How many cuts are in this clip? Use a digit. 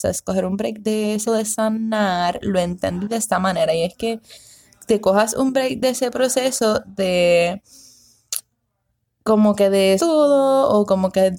2